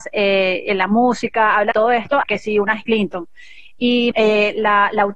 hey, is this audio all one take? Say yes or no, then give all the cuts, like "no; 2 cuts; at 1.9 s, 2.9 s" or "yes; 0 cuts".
no; 4 cuts; at 1.7 s, 2.2 s, 2.8 s, 4.1 s